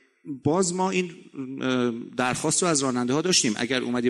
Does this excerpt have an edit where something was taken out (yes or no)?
no